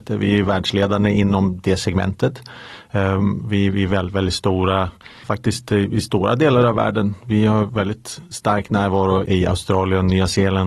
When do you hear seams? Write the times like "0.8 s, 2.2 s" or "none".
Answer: 5.2 s, 9.3 s